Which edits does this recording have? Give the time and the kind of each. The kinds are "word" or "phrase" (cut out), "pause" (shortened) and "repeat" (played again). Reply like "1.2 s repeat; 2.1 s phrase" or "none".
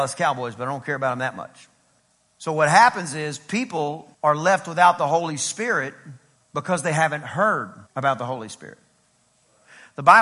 2.0 s pause; 4.1 s pause; 6.4 s pause; 7.9 s pause